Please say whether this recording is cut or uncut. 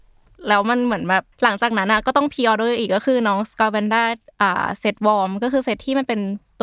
cut